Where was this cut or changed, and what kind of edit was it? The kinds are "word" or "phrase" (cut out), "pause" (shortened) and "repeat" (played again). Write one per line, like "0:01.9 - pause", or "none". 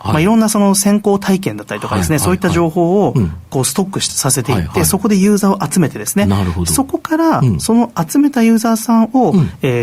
0:04.1 - phrase